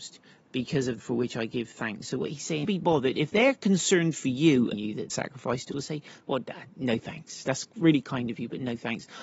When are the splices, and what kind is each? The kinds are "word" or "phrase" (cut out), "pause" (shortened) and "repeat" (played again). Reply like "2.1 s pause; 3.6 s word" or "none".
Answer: 1.0 s word; 2.6 s phrase; 4.7 s phrase; 5.1 s phrase; 5.7 s word